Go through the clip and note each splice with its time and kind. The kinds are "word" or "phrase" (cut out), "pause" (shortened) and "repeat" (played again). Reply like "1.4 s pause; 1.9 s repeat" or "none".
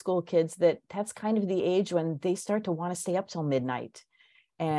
none

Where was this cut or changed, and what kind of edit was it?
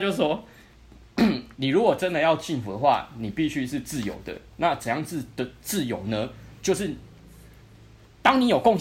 1.5 s pause

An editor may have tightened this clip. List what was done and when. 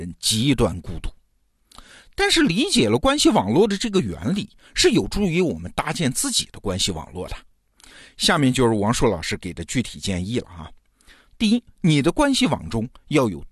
none

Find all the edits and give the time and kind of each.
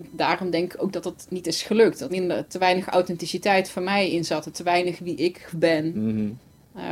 2.1 s word; 4.5 s word; 5.5 s word

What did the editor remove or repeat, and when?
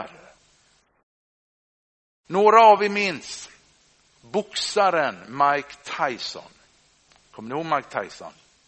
none

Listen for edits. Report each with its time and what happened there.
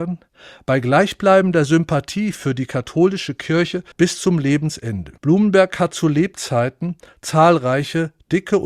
3.9 s pause; 5.2 s pause

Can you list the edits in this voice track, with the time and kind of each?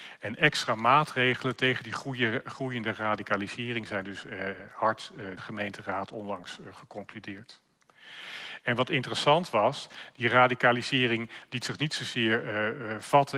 5.4 s phrase

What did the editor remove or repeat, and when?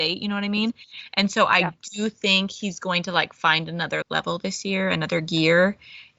4.0 s word

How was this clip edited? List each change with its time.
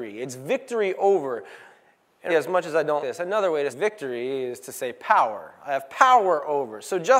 2.3 s word; 3.0 s word; 3.7 s word

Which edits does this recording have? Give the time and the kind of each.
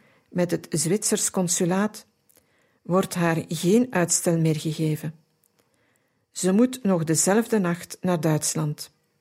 none

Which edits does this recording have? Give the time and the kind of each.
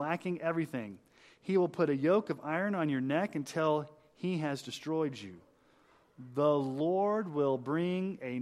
none

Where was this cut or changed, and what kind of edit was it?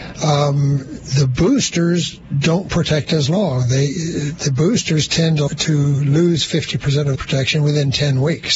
5.5 s word; 7.1 s word

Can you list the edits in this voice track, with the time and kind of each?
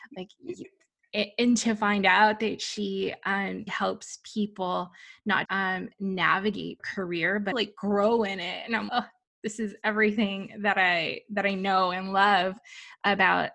3.7 s word; 5.4 s word; 6.8 s word; 7.5 s word; 8.9 s word

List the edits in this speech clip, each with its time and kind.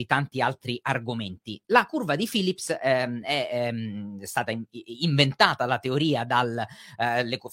none

